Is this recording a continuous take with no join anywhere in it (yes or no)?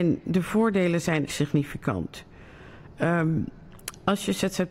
no